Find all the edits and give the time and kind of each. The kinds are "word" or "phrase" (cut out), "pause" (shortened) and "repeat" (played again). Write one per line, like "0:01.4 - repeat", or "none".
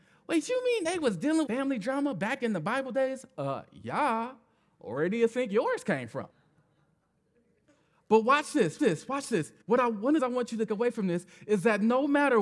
0:01.5 - word
0:06.3 - pause
0:08.8 - repeat
0:09.6 - pause
0:10.2 - phrase
0:10.7 - word